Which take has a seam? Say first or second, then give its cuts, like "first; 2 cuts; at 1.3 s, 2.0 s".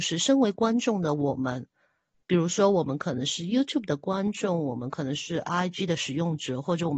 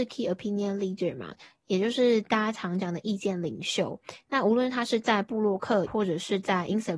second; 1 cut; at 5.9 s